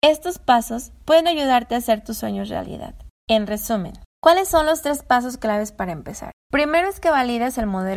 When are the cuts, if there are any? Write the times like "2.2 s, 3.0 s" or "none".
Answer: 3.2 s, 4.1 s, 6.4 s